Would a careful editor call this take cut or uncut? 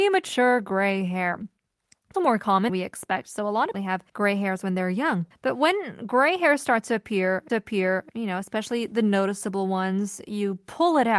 cut